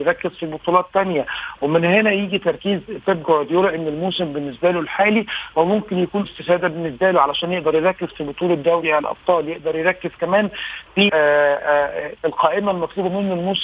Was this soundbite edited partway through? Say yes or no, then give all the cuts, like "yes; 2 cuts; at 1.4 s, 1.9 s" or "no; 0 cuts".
yes; 2 cuts; at 6.2 s, 11.1 s